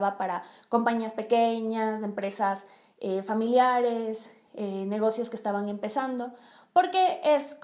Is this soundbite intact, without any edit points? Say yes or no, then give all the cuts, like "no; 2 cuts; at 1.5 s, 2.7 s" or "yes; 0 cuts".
yes; 0 cuts